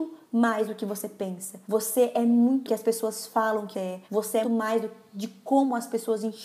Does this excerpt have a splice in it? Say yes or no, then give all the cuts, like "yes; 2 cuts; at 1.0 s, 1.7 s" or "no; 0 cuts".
yes; 5 cuts; at 1.6 s, 2.7 s, 3.7 s, 4.0 s, 4.4 s